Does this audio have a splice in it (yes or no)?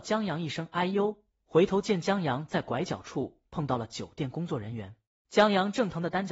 yes